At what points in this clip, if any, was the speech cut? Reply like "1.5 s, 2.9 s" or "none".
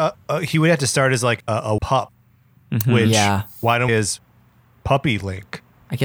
1.4 s, 1.8 s, 3.9 s